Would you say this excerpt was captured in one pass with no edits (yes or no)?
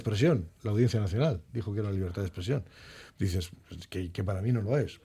yes